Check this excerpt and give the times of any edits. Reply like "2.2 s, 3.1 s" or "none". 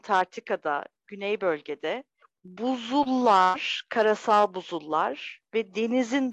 2.2 s